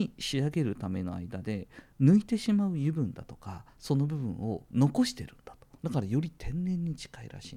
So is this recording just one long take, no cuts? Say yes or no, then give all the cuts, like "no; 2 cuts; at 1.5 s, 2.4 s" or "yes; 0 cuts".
no; 2 cuts; at 3.7 s, 5.8 s